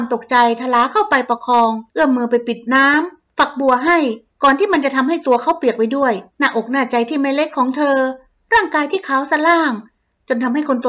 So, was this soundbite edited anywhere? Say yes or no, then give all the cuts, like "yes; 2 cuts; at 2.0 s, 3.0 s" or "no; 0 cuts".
yes; 3 cuts; at 1.9 s, 4.3 s, 6.3 s